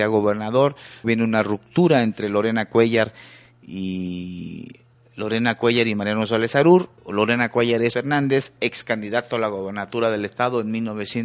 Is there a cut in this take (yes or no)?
yes